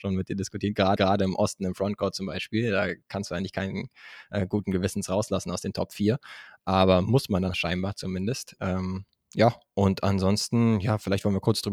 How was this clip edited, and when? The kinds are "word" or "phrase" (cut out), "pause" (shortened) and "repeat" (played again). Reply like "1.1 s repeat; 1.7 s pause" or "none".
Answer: 1.0 s repeat; 3.0 s pause; 7.5 s word

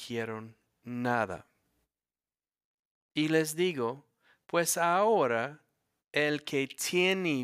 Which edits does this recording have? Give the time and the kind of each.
none

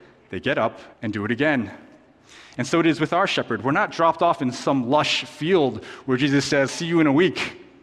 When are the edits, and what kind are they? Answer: 0.9 s pause; 6.7 s word

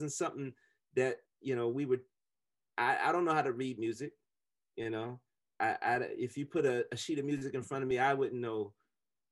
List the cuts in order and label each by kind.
none

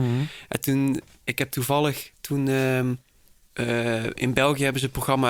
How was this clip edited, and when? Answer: none

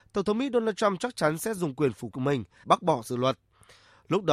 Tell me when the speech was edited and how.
2.1 s word; 2.6 s word

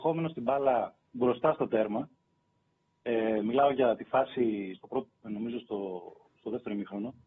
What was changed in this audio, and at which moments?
none

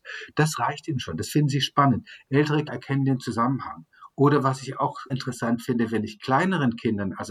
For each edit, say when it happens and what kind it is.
2.7 s word; 5.1 s word

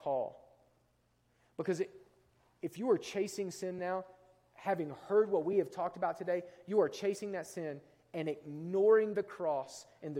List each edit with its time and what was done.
none

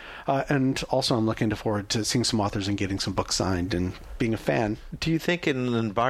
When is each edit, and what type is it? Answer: none

